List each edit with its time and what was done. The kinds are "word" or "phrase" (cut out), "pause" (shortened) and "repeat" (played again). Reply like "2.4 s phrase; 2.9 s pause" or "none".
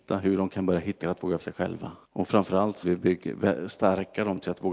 1.0 s word; 1.4 s word; 2.0 s pause; 2.8 s word